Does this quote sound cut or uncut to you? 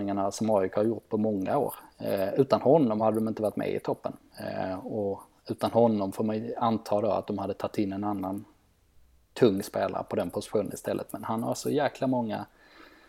uncut